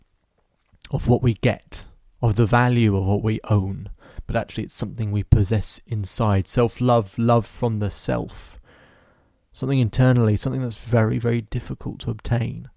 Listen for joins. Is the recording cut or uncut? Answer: uncut